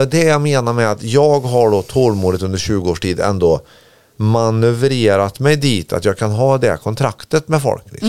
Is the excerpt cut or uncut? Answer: uncut